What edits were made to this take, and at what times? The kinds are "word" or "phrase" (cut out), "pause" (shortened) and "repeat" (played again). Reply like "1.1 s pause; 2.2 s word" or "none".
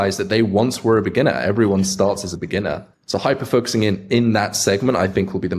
2.9 s pause

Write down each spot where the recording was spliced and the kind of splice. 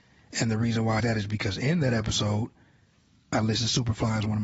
1.0 s word

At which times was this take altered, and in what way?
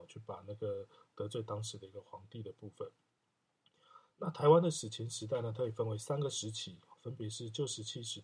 6.9 s word

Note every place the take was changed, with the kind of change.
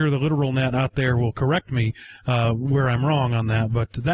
none

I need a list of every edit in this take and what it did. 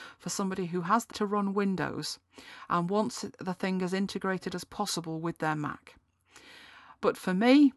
1.1 s word

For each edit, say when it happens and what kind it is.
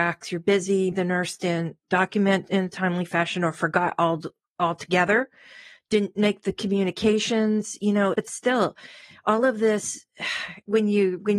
0.9 s word; 8.1 s word

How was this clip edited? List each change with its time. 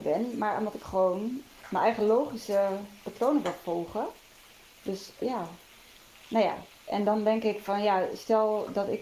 5.2 s word

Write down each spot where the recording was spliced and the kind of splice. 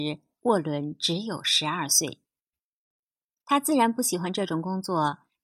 none

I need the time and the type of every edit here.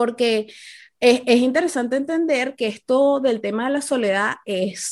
none

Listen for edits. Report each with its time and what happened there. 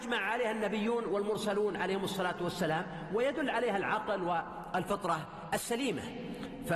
none

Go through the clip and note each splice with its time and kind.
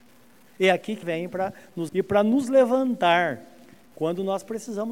1.0 s word; 1.9 s word

